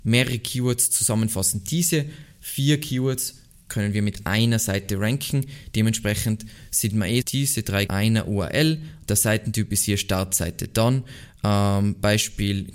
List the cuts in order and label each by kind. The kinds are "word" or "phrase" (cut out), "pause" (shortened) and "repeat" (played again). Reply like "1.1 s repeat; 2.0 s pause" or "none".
7.2 s word; 7.9 s phrase